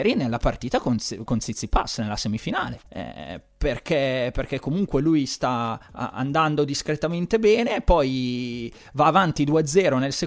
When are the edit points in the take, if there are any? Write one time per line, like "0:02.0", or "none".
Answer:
0:01.3
0:02.9
0:05.8